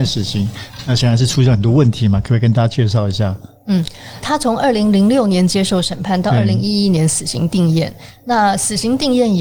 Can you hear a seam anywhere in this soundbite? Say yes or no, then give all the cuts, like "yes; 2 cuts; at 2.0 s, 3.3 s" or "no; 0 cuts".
yes; 1 cut; at 4.2 s